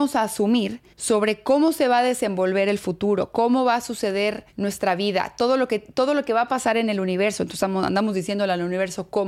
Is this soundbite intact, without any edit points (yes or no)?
no